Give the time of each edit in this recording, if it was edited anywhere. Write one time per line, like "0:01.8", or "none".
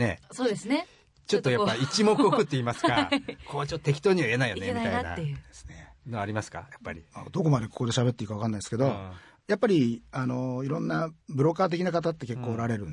0:11.2